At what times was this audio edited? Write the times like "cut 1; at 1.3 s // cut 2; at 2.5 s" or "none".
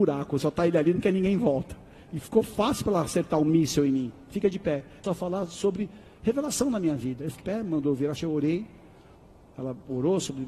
cut 1; at 5.0 s // cut 2; at 7.4 s // cut 3; at 8.2 s

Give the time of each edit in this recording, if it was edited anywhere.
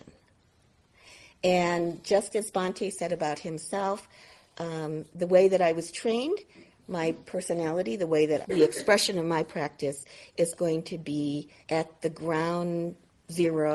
cut 1; at 8.4 s // cut 2; at 10.6 s // cut 3; at 11.6 s

